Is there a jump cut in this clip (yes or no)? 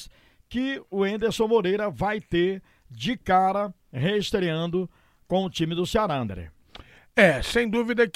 no